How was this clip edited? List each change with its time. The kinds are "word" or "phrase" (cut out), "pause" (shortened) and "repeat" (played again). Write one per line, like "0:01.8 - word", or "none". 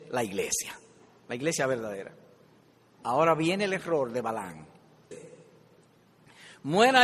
0:05.1 - word